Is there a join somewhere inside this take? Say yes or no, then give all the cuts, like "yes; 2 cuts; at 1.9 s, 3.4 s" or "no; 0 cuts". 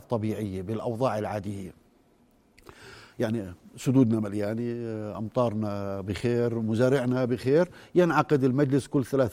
no; 0 cuts